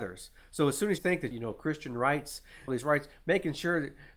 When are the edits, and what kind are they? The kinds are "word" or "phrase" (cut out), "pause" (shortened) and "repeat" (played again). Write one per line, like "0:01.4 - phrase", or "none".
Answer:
0:01.0 - word
0:01.3 - phrase
0:02.7 - phrase

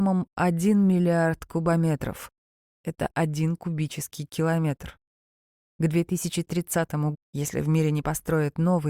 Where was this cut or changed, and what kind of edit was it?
0:07.1 - word

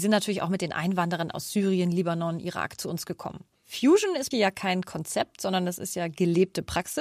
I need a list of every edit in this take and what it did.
0:04.3 - phrase

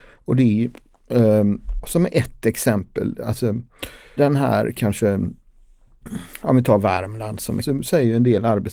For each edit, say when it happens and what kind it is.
0:01.8 - word
0:04.2 - word
0:07.6 - word

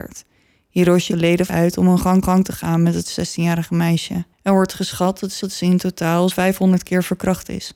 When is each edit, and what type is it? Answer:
0:01.1 - word
0:01.5 - phrase
0:02.2 - repeat
0:04.3 - pause
0:05.4 - repeat
0:06.3 - word

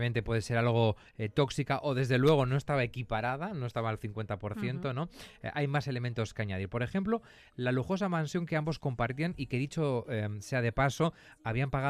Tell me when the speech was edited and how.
none

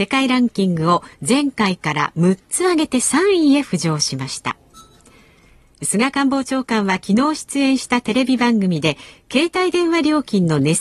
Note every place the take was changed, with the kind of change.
none

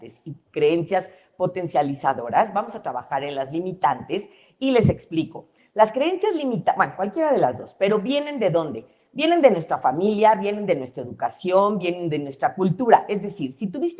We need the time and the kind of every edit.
none

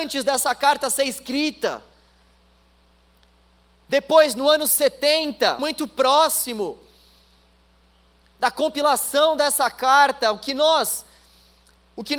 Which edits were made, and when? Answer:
0:05.6 - phrase

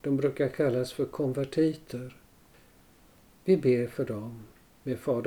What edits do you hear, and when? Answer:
none

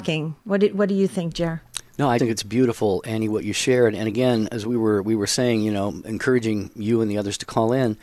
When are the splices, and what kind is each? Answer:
0:01.9 - pause
0:02.2 - word

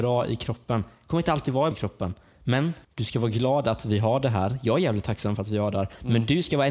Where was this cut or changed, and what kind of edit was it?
0:01.7 - word
0:02.8 - pause

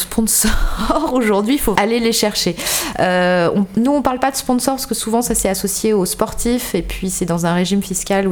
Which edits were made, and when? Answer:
0:01.8 - word

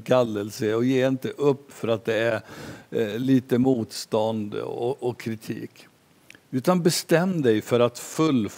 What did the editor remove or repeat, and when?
none

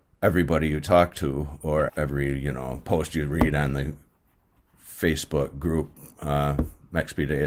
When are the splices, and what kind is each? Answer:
0:01.9 - word

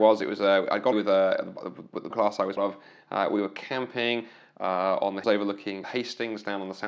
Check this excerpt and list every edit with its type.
0:00.9 - word
0:02.1 - word
0:02.6 - word
0:05.2 - word
0:05.8 - word

